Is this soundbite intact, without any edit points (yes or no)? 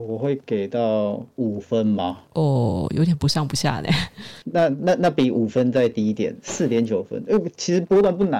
no